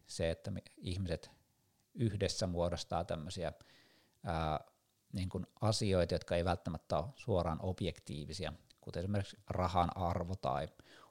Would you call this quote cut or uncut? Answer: uncut